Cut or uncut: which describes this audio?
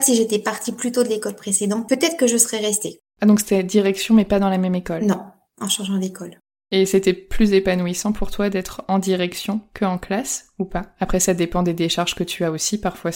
uncut